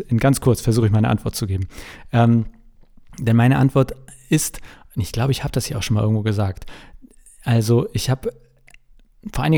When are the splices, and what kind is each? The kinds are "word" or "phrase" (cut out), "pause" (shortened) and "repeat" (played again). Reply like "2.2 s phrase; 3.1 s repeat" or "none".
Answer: none